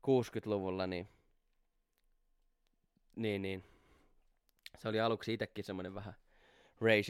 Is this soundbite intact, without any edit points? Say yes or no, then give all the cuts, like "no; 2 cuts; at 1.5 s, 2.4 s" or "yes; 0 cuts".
yes; 0 cuts